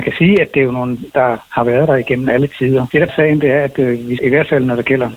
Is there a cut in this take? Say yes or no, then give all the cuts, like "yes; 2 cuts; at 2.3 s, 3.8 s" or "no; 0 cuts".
yes; 3 cuts; at 1.1 s, 3.1 s, 4.2 s